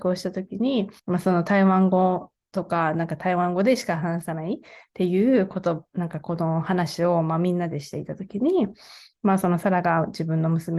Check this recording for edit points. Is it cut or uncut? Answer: cut